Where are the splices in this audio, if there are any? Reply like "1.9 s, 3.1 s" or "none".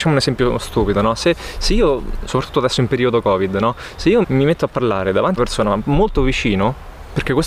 4.2 s, 5.4 s